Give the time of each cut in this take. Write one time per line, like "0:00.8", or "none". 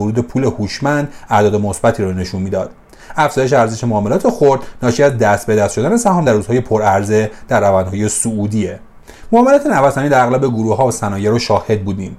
none